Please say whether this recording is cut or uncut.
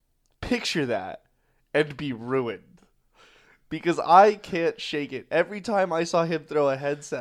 uncut